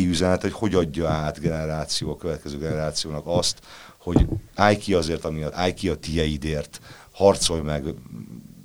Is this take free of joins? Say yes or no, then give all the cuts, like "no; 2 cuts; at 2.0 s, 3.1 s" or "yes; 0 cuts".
no; 1 cut; at 5.5 s